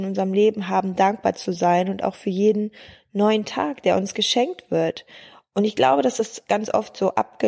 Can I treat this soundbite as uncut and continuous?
yes; 0 cuts

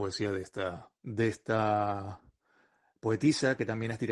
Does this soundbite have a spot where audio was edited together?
yes; 1 cut; at 1.0 s

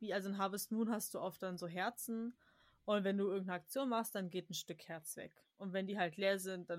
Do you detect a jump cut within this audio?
no; 0 cuts

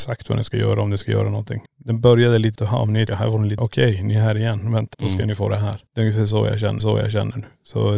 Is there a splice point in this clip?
yes; 7 cuts; at 1.7 s, 2.6 s, 3.1 s, 3.6 s, 4.9 s, 5.9 s, 6.8 s

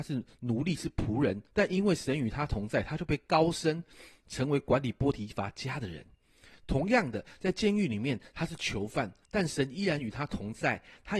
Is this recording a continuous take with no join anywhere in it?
no; 2 cuts; at 1.5 s, 9.2 s

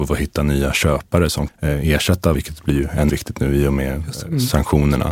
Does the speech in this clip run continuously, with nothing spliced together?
no; 3 cuts; at 1.5 s, 2.3 s, 3.1 s

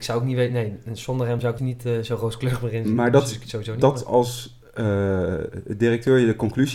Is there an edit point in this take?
yes; 1 cut; at 1.6 s

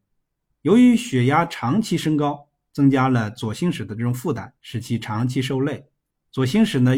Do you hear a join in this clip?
yes; 1 cut; at 4.6 s

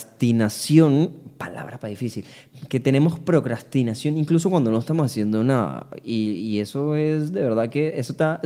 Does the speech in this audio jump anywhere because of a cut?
no; 0 cuts

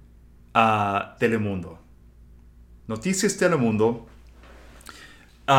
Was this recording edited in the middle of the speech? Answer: yes; 1 cut; at 1.2 s

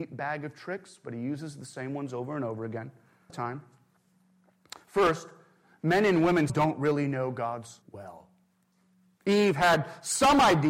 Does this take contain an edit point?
yes; 3 cuts; at 3.3 s, 6.5 s, 7.8 s

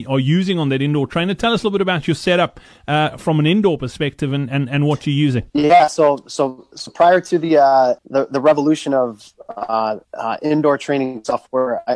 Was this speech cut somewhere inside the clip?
yes; 3 cuts; at 5.5 s, 8.0 s, 10.0 s

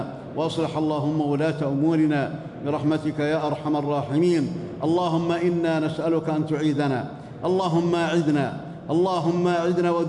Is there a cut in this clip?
no; 0 cuts

